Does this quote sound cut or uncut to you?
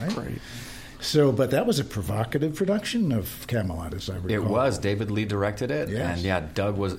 uncut